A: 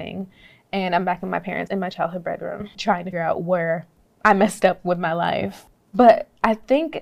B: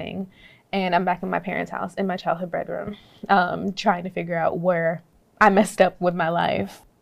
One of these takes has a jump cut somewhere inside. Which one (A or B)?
A